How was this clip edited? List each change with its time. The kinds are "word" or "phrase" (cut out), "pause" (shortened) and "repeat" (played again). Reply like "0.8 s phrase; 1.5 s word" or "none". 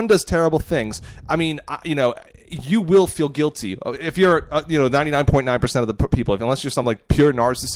none